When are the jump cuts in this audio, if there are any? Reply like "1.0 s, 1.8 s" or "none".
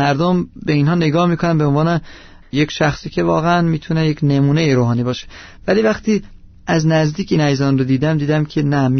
none